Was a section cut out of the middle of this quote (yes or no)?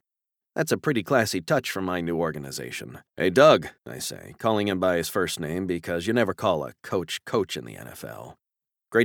yes